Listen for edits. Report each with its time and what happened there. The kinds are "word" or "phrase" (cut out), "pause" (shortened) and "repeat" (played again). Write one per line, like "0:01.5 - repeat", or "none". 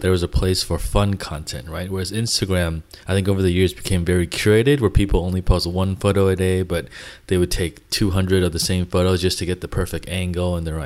0:03.0 - pause